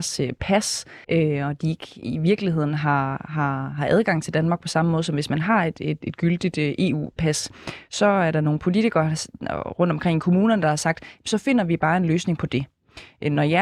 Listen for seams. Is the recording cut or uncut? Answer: cut